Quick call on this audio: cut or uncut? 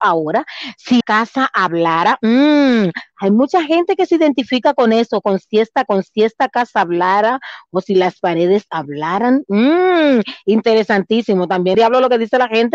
cut